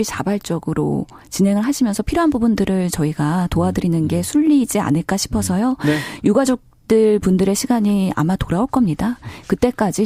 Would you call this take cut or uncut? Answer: uncut